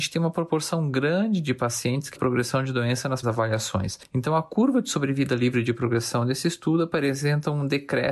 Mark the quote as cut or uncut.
cut